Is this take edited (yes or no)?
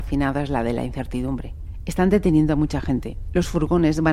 no